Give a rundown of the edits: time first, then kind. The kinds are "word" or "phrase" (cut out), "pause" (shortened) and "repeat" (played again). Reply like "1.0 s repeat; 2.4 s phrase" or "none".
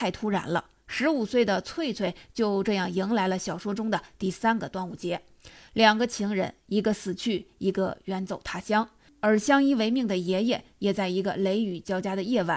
none